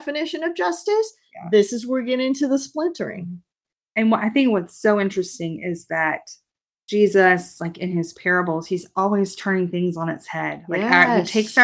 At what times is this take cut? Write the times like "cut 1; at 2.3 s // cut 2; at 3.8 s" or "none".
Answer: none